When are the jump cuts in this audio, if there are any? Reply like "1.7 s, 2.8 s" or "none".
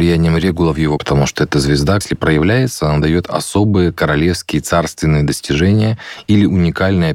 1.0 s, 2.0 s